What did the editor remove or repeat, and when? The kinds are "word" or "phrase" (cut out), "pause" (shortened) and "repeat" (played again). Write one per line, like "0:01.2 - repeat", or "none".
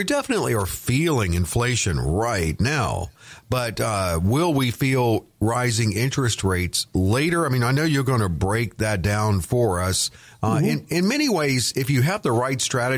none